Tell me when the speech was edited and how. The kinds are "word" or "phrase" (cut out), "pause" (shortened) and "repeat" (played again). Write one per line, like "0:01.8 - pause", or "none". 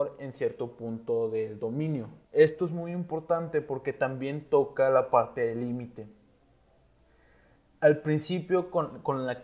0:02.2 - pause